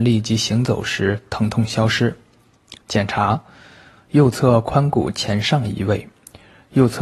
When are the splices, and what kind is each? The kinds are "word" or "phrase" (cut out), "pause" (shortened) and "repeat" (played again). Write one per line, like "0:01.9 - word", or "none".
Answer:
0:02.8 - pause